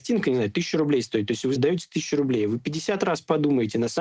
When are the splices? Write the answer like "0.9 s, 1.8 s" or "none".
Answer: 1.6 s